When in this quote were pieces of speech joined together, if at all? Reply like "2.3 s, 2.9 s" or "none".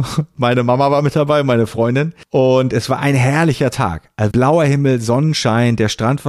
4.3 s